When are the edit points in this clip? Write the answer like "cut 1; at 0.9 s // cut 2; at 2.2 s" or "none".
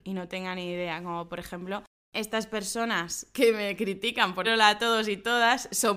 cut 1; at 4.4 s